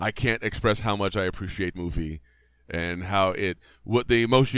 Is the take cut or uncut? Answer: cut